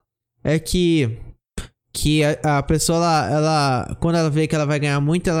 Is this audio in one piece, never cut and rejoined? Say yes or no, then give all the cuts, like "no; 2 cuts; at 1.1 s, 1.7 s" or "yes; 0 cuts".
yes; 0 cuts